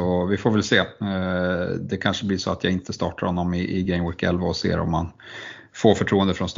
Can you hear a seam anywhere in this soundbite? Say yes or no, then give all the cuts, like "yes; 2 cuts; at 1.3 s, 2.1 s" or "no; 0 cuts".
no; 0 cuts